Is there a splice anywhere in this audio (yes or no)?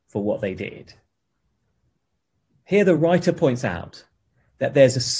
no